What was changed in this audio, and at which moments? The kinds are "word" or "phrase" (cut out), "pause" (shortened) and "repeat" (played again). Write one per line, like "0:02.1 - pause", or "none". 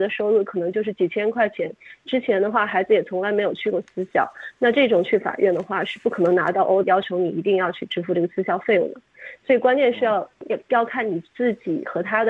0:06.8 - word